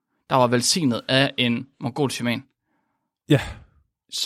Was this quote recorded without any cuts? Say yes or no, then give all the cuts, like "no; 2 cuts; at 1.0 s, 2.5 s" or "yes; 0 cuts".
yes; 0 cuts